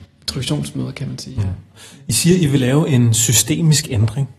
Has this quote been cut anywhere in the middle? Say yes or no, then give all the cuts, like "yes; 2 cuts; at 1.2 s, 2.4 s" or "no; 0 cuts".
no; 0 cuts